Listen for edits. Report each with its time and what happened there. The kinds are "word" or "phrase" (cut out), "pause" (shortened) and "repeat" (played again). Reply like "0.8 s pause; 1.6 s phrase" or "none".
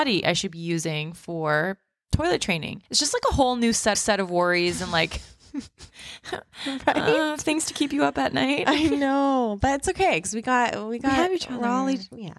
2.9 s pause; 3.9 s repeat